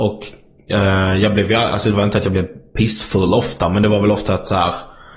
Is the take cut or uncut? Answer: uncut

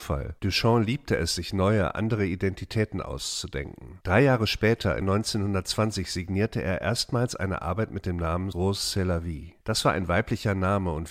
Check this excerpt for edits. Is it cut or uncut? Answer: cut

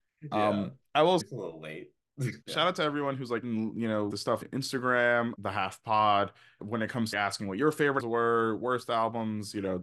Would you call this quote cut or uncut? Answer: cut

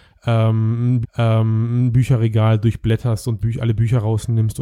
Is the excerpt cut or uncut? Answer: cut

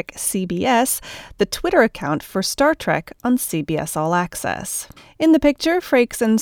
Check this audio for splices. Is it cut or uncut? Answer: cut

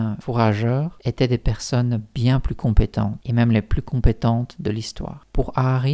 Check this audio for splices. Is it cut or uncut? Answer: uncut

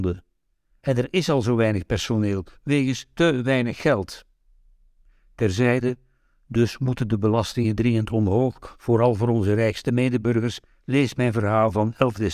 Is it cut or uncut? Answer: uncut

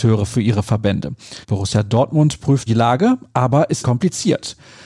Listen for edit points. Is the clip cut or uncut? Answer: cut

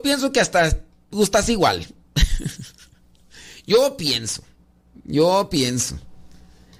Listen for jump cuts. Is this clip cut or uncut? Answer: uncut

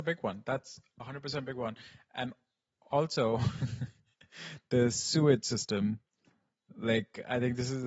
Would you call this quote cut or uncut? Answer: uncut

